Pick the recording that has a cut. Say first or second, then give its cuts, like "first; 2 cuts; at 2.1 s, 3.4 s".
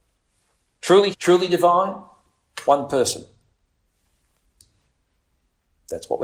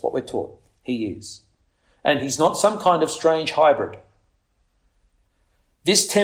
first; 1 cut; at 1.1 s